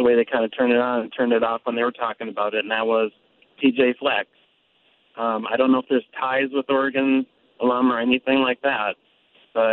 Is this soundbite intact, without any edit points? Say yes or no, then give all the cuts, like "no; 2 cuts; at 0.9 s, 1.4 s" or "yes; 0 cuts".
yes; 0 cuts